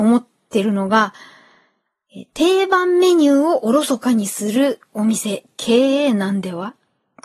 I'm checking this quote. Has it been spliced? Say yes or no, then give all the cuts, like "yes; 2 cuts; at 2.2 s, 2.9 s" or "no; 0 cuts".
yes; 1 cut; at 2.3 s